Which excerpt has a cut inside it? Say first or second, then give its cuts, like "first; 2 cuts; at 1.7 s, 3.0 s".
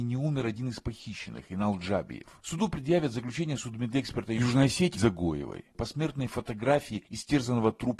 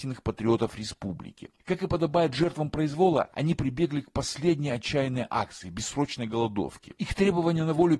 first; 1 cut; at 4.9 s